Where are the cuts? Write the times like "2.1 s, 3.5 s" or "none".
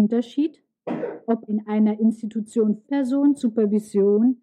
1.5 s, 2.8 s